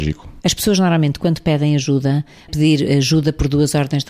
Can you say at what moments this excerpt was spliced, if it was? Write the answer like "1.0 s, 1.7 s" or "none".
2.5 s